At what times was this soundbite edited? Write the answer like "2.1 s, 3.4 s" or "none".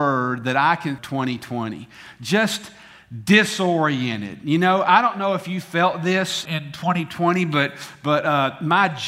1.0 s, 6.5 s